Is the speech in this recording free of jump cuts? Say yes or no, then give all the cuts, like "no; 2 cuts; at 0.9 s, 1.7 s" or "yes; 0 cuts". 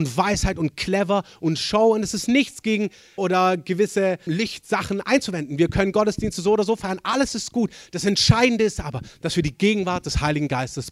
no; 2 cuts; at 3.2 s, 4.3 s